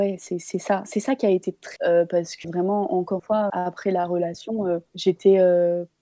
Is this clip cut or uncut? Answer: cut